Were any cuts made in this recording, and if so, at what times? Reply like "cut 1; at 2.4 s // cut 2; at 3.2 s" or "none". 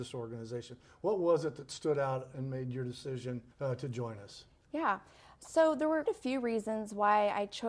cut 1; at 3.5 s // cut 2; at 6.1 s